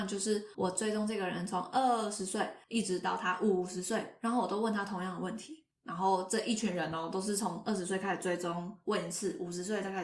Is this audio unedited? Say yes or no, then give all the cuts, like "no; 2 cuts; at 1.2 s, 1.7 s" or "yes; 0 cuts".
no; 2 cuts; at 2.6 s, 5.7 s